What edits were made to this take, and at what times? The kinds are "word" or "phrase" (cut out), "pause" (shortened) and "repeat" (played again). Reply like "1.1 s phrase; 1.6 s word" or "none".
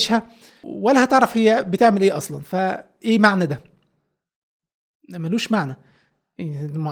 none